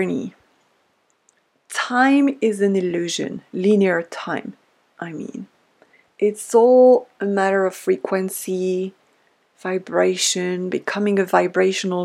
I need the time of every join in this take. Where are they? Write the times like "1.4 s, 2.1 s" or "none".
none

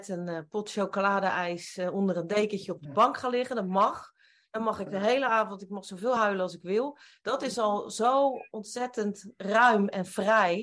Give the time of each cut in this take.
none

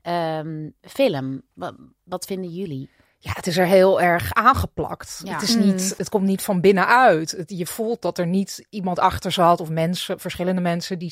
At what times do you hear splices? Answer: none

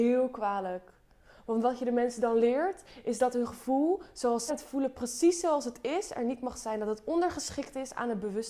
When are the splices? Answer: 4.5 s

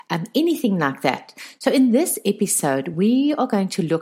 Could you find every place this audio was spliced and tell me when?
none

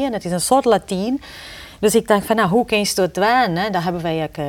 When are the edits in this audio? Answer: none

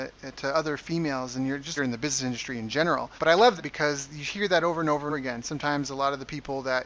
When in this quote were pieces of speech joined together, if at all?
1.8 s, 3.2 s, 3.6 s, 5.1 s

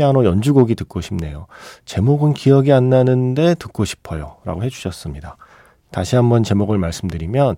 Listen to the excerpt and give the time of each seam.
none

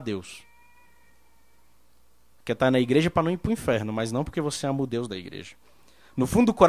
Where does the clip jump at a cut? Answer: none

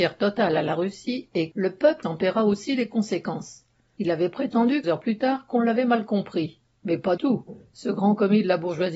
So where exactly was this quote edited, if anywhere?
1.5 s, 2.0 s, 4.8 s, 7.2 s

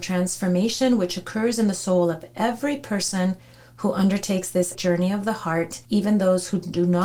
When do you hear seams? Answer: 4.7 s

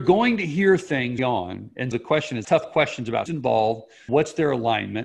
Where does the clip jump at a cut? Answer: 1.2 s, 1.9 s, 2.4 s, 3.3 s, 4.1 s

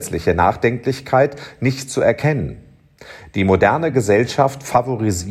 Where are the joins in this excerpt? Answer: none

